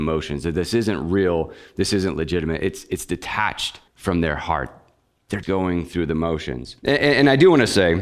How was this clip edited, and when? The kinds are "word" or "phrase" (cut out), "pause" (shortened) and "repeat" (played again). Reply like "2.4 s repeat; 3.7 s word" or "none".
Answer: 3.9 s pause; 5.4 s word; 6.8 s pause